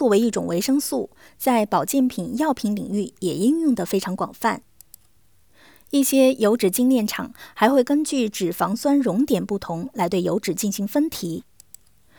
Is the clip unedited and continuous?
yes; 0 cuts

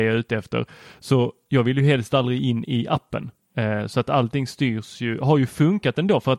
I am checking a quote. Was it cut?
no; 0 cuts

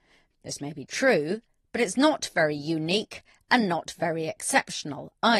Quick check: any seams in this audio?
no; 0 cuts

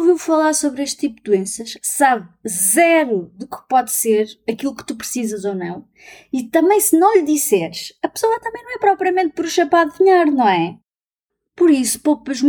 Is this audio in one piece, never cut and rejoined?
yes; 0 cuts

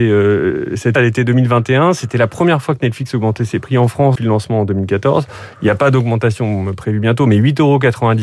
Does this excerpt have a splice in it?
yes; 2 cuts; at 1.0 s, 4.2 s

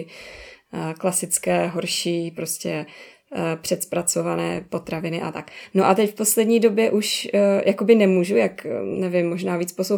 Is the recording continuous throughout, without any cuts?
yes; 0 cuts

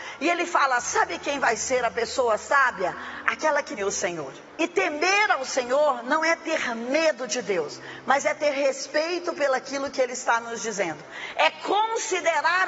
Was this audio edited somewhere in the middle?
yes; 2 cuts; at 3.8 s, 4.5 s

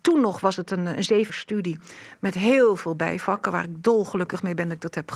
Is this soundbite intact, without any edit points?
no; 1 cut; at 1.3 s

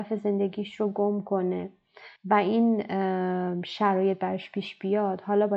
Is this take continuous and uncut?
no; 1 cut; at 2.2 s

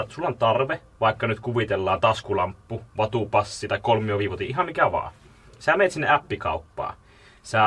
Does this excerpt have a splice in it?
no; 0 cuts

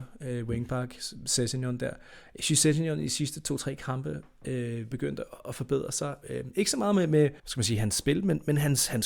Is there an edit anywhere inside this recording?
yes; 2 cuts; at 4.9 s, 7.4 s

